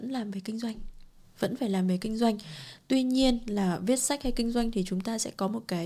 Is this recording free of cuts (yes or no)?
yes